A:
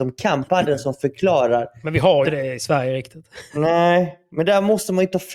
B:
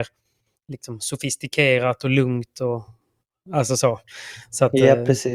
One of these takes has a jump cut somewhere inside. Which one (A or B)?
A